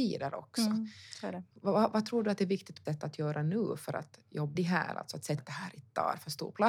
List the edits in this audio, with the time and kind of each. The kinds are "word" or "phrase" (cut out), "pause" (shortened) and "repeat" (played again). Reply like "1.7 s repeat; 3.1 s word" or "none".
1.5 s pause; 2.9 s word; 4.6 s phrase; 5.4 s word